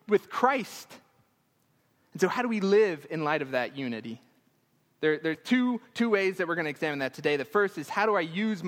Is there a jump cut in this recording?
no; 0 cuts

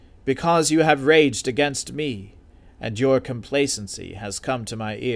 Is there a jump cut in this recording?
no; 0 cuts

